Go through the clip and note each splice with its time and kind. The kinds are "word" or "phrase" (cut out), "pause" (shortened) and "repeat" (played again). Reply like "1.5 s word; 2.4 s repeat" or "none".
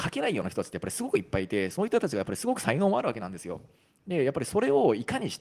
none